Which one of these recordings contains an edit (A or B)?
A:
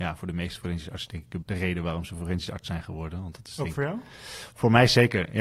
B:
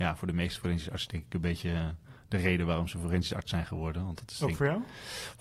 A